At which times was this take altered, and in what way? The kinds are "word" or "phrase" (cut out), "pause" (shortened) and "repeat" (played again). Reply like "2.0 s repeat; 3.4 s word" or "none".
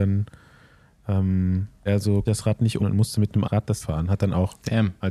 1.9 s word; 2.3 s word; 2.8 s word; 3.4 s word; 3.8 s word